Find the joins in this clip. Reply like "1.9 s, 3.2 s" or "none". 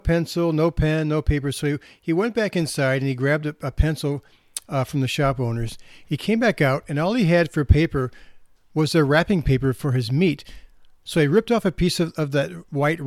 none